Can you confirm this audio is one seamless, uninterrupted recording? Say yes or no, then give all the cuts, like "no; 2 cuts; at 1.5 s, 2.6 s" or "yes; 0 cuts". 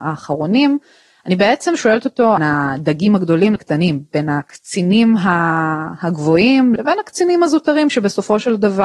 no; 3 cuts; at 2.4 s, 3.6 s, 6.8 s